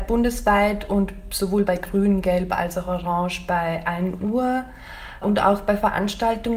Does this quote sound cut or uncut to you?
uncut